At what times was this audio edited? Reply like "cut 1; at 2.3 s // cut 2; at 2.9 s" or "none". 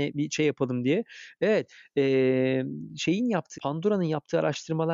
cut 1; at 3.5 s